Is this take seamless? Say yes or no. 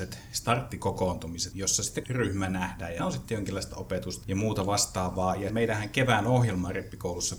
no